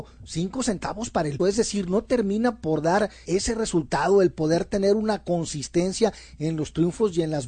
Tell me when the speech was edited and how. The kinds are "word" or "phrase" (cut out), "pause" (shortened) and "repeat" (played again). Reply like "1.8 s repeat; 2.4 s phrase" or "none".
1.4 s word; 3.3 s word